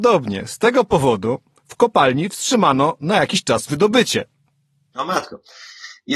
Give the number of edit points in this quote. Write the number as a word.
zero